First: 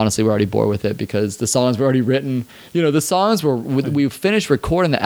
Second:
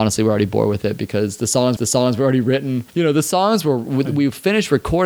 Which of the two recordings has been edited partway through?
second; 2 cuts; at 1.8 s, 2.9 s

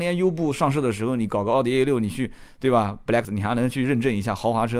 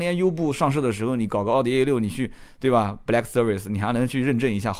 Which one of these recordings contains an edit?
first; 1 cut; at 3.2 s

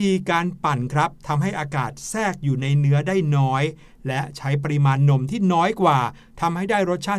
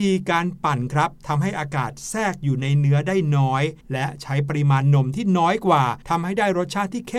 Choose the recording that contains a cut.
second; 2 cuts; at 3.8 s, 6.0 s

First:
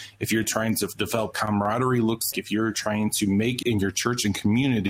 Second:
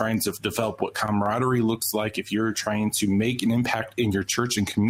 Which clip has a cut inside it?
first; 3 cuts; at 1.3 s, 2.3 s, 3.6 s

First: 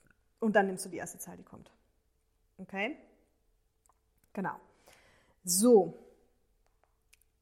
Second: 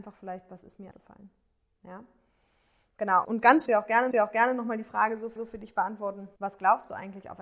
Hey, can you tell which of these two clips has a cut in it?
second; 6 cuts; at 0.9 s, 3.2 s, 3.7 s, 4.1 s, 5.4 s, 6.4 s

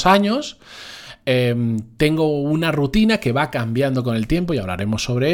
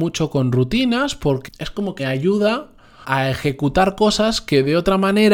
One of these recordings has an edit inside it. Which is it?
second; 3 cuts; at 1.5 s, 2.0 s, 3.0 s

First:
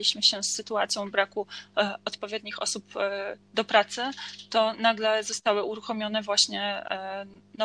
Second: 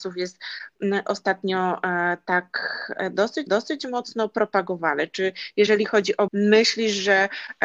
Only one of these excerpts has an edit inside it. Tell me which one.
second; 2 cuts; at 3.5 s, 6.3 s

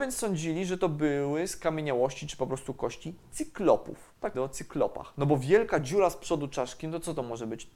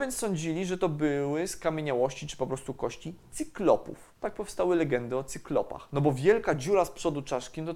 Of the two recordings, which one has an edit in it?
first; 1 cut; at 4.3 s

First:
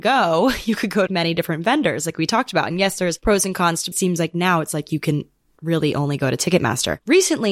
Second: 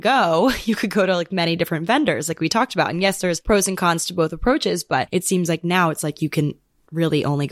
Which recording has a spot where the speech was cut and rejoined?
first; 2 cuts; at 1.1 s, 3.9 s

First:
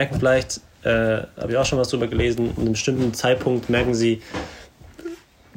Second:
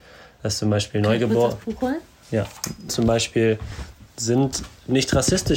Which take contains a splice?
second; 1 cut; at 2.9 s

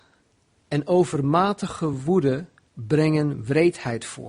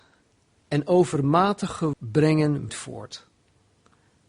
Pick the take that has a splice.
second; 2 cuts; at 1.9 s, 2.7 s

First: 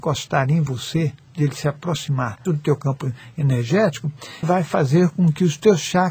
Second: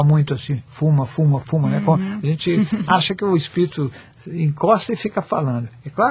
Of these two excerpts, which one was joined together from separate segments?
first; 2 cuts; at 2.5 s, 4.4 s

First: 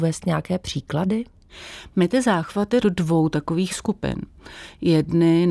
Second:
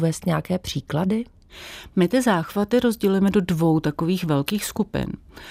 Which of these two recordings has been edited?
first; 2 cuts; at 2.8 s, 3.7 s

